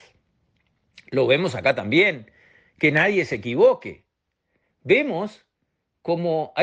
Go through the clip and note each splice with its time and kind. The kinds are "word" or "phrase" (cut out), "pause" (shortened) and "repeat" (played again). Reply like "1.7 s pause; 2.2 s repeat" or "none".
none